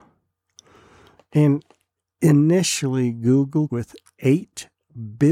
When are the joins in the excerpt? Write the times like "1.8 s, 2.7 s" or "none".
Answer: 3.7 s